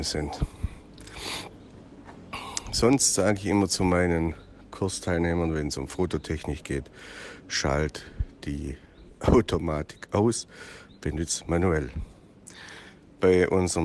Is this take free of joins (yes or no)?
yes